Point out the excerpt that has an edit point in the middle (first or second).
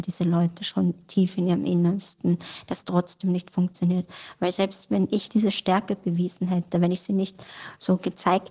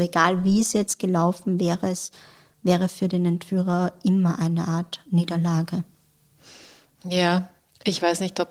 first